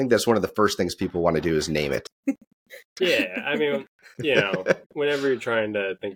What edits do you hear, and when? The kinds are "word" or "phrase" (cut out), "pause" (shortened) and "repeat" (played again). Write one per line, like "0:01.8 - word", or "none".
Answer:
0:04.8 - word